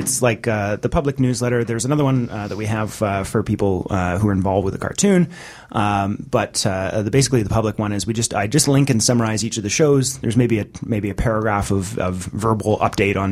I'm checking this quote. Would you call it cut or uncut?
uncut